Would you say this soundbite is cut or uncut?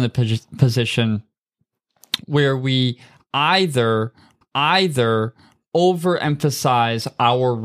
cut